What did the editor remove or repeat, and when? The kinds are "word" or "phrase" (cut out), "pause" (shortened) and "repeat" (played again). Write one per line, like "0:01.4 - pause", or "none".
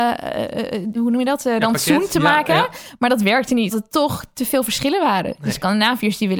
0:00.9 - word
0:03.7 - word